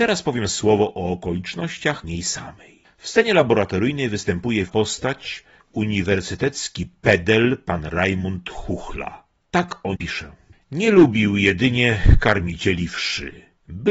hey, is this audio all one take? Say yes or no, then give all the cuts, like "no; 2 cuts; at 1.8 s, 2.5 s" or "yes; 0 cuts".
no; 4 cuts; at 2.0 s, 4.7 s, 5.6 s, 10.0 s